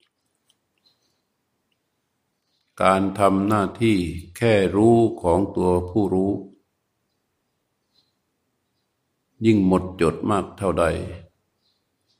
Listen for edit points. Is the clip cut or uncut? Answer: uncut